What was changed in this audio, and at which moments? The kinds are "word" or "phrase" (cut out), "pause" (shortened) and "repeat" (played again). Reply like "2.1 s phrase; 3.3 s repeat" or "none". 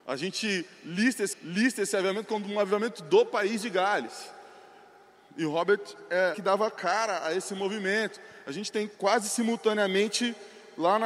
1.3 s repeat; 6.3 s phrase; 9.0 s pause